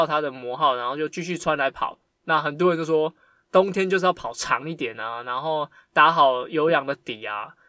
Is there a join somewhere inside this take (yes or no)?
no